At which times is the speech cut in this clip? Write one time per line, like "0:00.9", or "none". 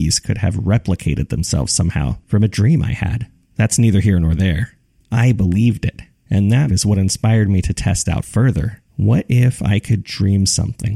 0:03.4
0:04.9
0:06.1
0:06.7
0:08.0
0:08.9